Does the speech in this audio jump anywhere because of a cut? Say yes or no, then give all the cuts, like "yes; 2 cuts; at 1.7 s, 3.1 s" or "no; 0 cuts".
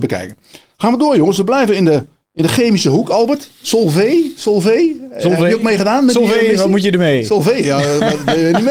no; 0 cuts